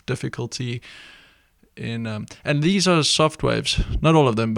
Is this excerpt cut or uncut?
uncut